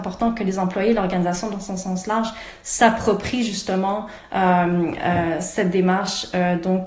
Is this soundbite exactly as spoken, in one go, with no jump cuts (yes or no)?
yes